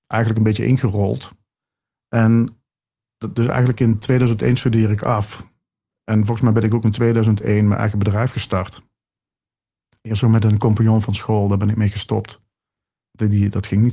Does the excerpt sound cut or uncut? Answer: uncut